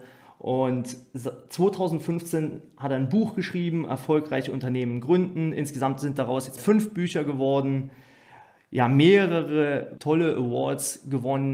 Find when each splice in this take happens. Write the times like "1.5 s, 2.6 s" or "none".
6.6 s, 10.0 s